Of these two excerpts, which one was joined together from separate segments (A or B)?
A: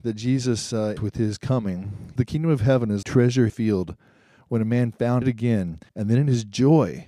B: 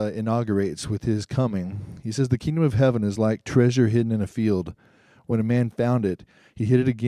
A